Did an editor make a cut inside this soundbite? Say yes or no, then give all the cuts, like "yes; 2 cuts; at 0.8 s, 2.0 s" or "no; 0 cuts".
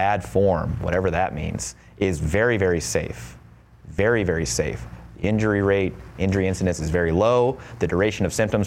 no; 0 cuts